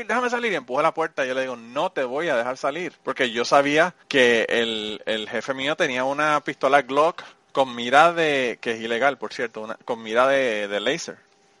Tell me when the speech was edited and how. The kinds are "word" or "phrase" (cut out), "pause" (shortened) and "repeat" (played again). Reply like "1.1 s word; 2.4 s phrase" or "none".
3.0 s pause; 4.0 s pause; 7.3 s pause